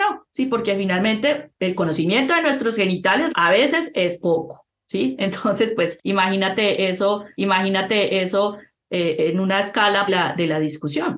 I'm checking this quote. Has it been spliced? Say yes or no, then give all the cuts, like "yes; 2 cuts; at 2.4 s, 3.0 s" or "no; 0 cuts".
yes; 3 cuts; at 3.3 s, 7.3 s, 10.1 s